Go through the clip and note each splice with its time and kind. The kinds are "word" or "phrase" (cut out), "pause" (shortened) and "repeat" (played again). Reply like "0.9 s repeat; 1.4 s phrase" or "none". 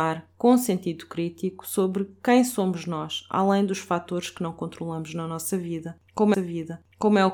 6.3 s repeat